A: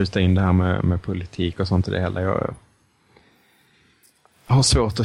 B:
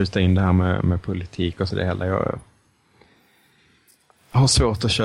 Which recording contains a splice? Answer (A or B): B